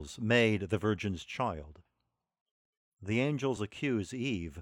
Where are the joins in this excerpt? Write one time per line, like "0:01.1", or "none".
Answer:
none